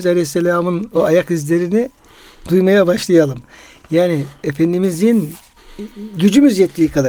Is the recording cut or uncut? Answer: uncut